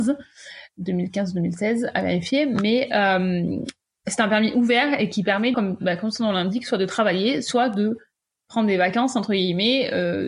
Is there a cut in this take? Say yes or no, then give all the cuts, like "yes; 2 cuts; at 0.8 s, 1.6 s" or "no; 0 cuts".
yes; 1 cut; at 5.5 s